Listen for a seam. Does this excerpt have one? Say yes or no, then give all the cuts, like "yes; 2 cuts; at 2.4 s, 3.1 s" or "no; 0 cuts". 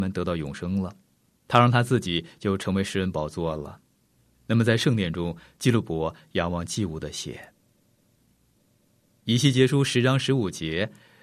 no; 0 cuts